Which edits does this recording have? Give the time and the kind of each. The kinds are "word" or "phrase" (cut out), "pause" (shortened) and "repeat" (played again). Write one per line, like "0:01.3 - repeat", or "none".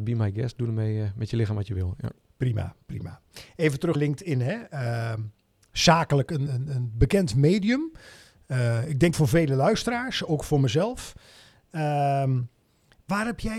0:03.9 - word
0:06.5 - word
0:09.1 - word